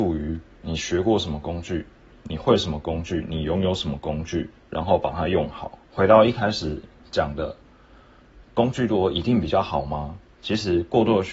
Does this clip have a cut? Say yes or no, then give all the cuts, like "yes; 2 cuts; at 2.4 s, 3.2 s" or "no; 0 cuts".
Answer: yes; 1 cut; at 5.8 s